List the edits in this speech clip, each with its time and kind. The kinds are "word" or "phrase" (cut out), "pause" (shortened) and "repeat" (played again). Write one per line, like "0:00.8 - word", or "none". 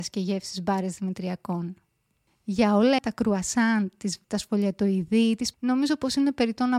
0:03.0 - word
0:04.2 - word
0:05.5 - word